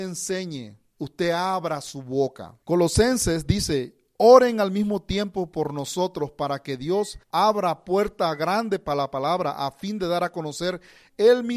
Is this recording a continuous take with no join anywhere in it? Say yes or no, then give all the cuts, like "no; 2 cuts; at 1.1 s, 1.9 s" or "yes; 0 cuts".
no; 2 cuts; at 2.6 s, 7.2 s